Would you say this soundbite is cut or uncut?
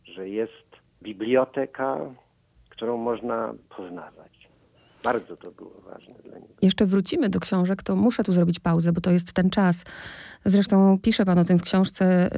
cut